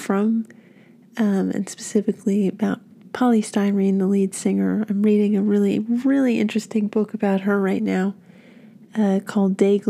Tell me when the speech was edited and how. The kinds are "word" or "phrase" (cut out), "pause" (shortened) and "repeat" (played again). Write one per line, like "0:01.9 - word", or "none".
none